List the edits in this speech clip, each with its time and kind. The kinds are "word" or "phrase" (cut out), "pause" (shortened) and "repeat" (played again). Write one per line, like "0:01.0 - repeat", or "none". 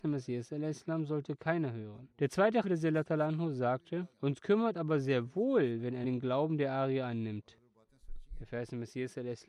0:02.1 - pause
0:02.6 - word
0:04.1 - pause
0:04.7 - word
0:06.0 - word